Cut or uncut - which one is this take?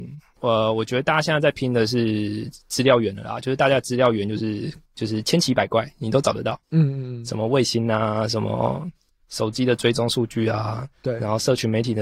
cut